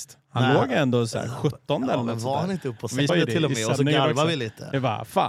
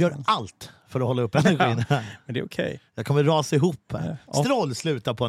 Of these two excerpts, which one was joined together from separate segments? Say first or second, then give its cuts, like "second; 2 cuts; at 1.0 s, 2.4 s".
first; 1 cut; at 3.1 s